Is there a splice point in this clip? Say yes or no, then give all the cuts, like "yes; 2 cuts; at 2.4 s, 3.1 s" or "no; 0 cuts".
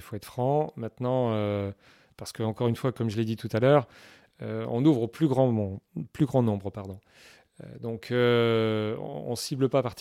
no; 0 cuts